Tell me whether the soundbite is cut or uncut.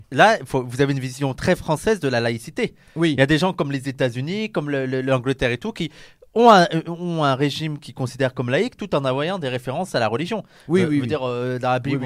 uncut